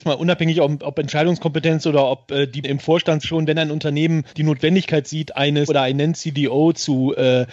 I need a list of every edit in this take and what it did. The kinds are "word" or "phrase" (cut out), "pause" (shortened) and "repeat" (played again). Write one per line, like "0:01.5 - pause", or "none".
0:02.6 - word
0:03.2 - phrase
0:04.3 - pause
0:05.7 - word